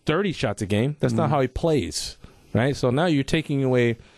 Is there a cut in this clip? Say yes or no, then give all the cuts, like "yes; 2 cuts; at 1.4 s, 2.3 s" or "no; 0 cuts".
no; 0 cuts